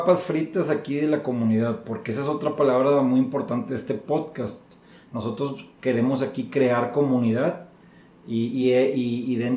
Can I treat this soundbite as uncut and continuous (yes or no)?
yes